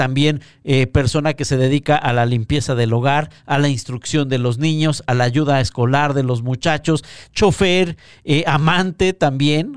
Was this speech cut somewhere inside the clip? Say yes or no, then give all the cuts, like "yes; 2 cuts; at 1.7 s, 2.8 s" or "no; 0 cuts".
no; 0 cuts